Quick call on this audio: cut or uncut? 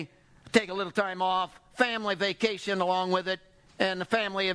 uncut